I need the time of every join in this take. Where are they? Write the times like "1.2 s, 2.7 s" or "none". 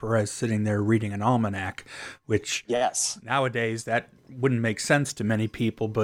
4.2 s